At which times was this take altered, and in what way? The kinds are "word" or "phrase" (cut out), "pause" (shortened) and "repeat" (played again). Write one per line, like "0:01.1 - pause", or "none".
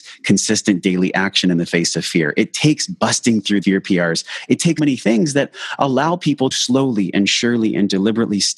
0:03.6 - word
0:04.8 - word
0:06.5 - word